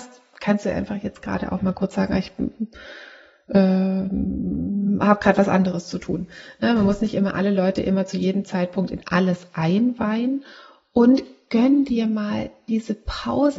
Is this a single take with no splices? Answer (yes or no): yes